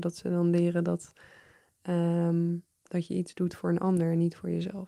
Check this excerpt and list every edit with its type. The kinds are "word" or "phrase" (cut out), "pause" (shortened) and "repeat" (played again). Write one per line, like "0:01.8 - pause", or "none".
none